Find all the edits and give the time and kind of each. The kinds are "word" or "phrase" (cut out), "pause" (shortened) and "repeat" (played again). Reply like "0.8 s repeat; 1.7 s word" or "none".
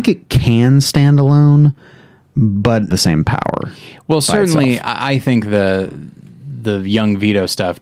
2.9 s phrase